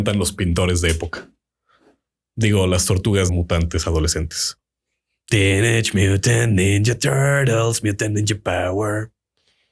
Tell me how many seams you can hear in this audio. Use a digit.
1